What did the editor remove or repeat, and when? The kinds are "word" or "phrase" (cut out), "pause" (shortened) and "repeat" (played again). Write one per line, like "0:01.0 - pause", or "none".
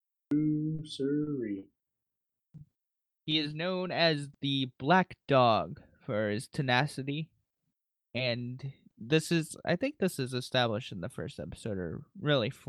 none